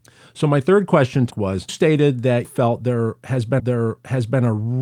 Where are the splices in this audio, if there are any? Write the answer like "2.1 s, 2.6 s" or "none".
1.3 s, 1.7 s, 2.4 s, 3.6 s